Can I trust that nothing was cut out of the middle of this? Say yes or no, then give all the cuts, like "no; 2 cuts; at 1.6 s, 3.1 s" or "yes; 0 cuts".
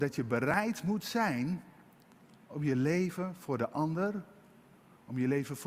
yes; 0 cuts